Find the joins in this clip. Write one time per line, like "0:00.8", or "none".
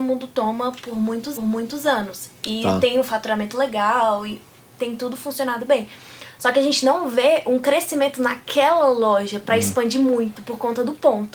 0:01.4